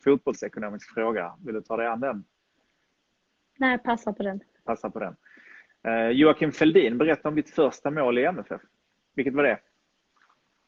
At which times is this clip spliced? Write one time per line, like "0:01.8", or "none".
none